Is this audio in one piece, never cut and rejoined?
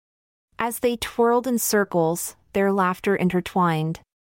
yes; 0 cuts

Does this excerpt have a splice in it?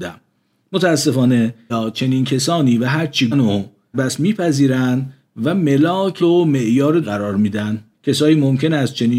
yes; 6 cuts; at 1.7 s, 3.3 s, 3.9 s, 6.2 s, 7.0 s, 7.9 s

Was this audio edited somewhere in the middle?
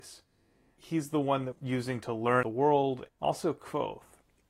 yes; 3 cuts; at 1.5 s, 2.4 s, 3.1 s

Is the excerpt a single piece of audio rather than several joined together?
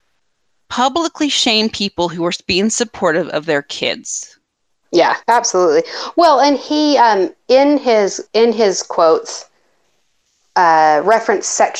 no; 2 cuts; at 5.2 s, 8.3 s

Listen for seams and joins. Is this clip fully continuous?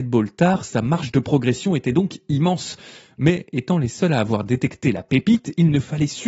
yes; 0 cuts

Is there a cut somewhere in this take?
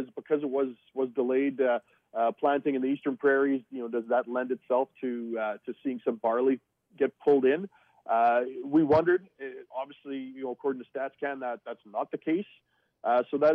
no; 0 cuts

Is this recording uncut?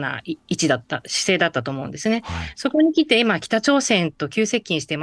yes; 0 cuts

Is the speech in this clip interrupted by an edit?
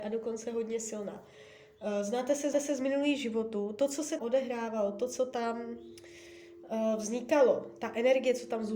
yes; 2 cuts; at 2.5 s, 4.2 s

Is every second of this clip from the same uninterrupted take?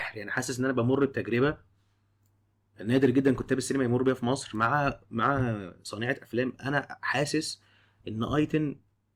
yes; 0 cuts

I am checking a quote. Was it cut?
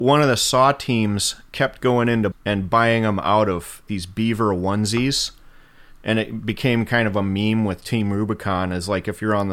yes; 2 cuts; at 2.3 s, 3.9 s

